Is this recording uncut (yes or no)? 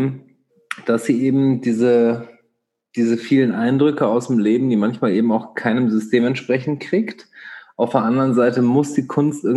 yes